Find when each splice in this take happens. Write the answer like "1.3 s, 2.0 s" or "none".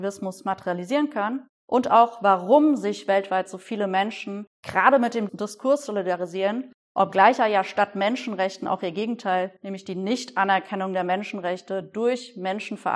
9.6 s